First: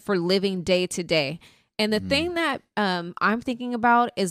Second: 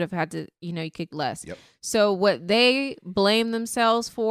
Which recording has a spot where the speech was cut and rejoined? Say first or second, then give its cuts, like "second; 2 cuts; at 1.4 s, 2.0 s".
second; 1 cut; at 1.1 s